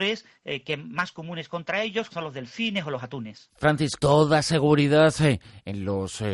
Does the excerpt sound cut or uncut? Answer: cut